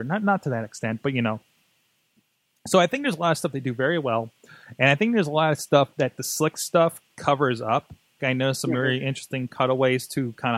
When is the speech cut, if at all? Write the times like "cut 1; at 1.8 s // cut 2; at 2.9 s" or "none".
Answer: cut 1; at 8.2 s